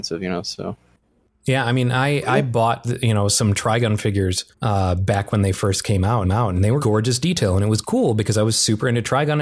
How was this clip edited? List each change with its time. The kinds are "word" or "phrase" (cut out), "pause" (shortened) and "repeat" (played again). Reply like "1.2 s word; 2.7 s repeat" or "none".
4.5 s pause; 6.2 s repeat; 6.8 s word